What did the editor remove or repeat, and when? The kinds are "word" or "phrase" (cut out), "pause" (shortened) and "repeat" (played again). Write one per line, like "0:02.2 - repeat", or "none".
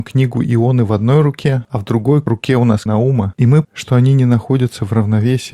0:02.9 - word
0:03.6 - word